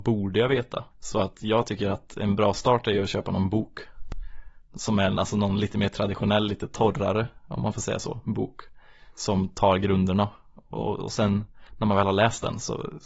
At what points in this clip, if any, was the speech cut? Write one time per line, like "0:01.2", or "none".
0:00.9
0:11.7